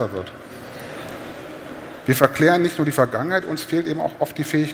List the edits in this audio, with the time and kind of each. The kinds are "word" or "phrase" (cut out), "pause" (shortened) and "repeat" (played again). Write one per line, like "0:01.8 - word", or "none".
none